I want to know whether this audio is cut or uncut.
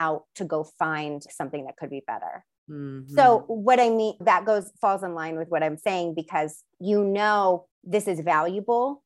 cut